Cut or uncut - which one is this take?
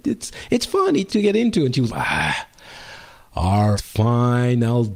cut